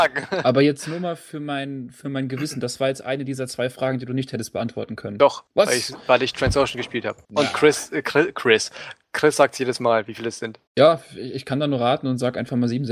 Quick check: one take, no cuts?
no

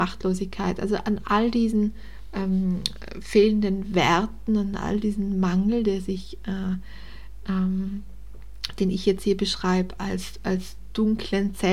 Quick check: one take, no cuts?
yes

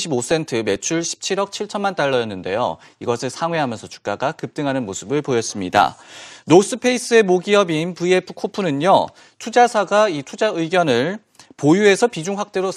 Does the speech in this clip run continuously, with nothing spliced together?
yes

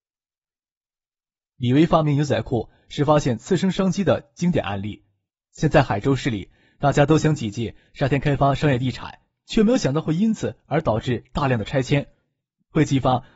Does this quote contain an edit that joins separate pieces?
no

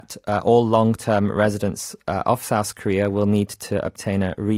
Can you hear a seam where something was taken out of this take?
no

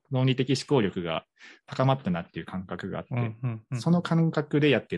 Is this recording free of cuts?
yes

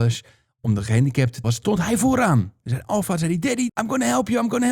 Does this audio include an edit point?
yes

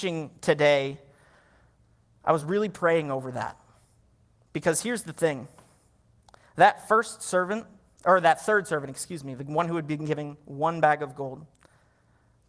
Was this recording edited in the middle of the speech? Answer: no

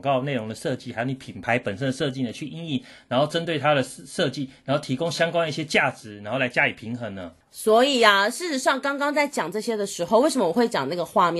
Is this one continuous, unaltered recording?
no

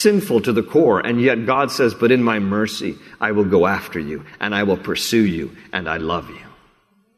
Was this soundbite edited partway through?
no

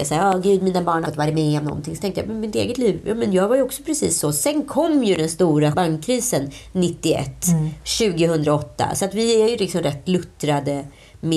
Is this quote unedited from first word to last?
no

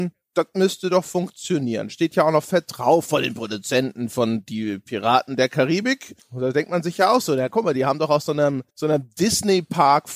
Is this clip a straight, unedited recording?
no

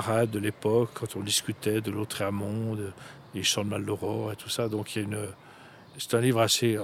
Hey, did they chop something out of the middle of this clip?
no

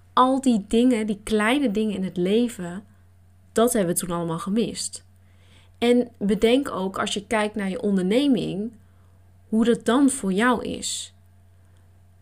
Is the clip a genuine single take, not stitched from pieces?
yes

